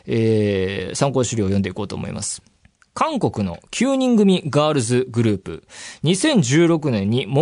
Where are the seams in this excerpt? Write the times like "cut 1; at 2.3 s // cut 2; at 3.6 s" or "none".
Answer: cut 1; at 2.6 s